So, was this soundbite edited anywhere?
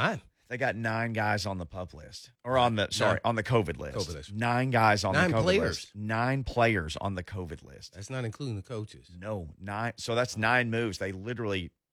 yes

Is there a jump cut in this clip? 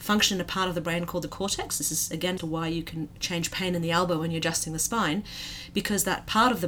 yes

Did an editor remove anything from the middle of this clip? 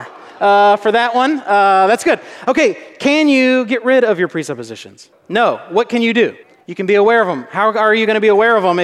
yes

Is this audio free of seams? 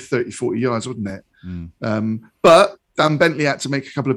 yes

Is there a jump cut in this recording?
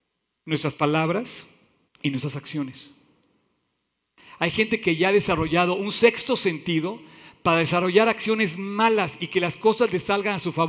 yes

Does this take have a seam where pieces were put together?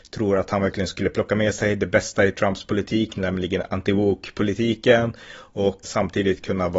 yes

